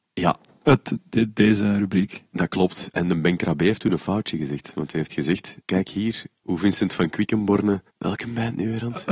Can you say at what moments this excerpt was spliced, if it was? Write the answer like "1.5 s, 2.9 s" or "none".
5.6 s, 7.9 s